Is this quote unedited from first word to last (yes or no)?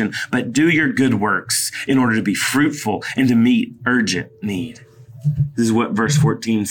yes